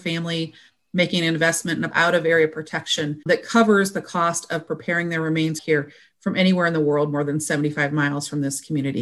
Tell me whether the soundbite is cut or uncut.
cut